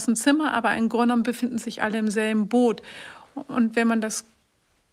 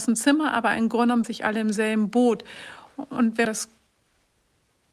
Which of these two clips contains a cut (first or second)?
second